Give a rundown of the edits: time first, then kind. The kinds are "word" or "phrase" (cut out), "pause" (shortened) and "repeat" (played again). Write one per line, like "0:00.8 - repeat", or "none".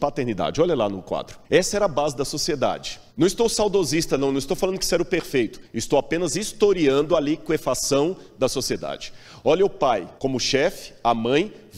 0:01.4 - pause
0:03.1 - pause
0:05.6 - pause
0:10.2 - pause

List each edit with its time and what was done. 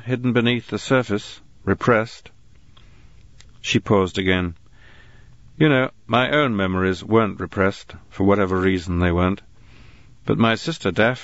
none

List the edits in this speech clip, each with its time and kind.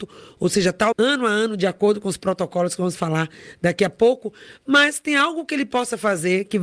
0:00.9 - word

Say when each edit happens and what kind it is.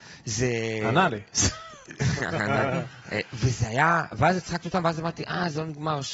none

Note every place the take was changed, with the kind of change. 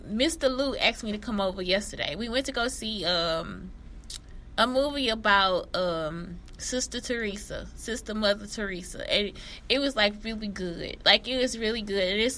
none

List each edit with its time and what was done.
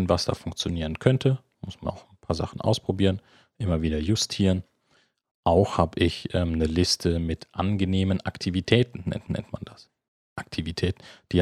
0:01.9 - word
0:09.3 - repeat
0:10.1 - pause

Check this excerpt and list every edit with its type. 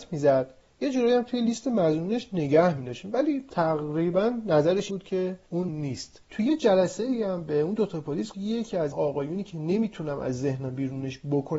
0:04.9 - word
0:05.7 - word
0:08.3 - phrase
0:08.9 - word

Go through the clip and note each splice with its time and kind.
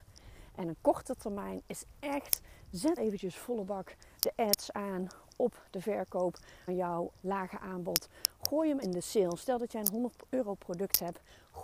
0:03.0 - word
0:06.7 - word
0:07.1 - word
0:08.8 - word

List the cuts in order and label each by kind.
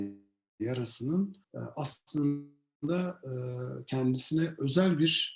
0:01.4 - pause

